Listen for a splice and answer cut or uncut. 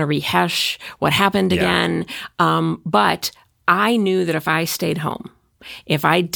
uncut